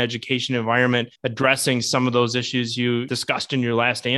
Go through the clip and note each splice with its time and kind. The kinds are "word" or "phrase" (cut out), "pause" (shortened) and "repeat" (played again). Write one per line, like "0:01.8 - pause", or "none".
0:01.2 - pause